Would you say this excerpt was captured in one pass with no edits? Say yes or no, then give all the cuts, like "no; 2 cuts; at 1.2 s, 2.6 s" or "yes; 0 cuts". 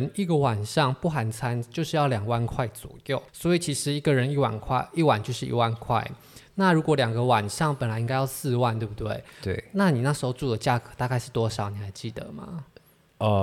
no; 1 cut; at 3.3 s